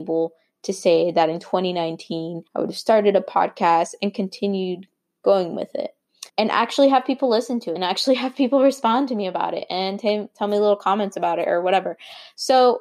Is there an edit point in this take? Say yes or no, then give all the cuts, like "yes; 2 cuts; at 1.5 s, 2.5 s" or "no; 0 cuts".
yes; 3 cuts; at 2.5 s, 6.3 s, 7.8 s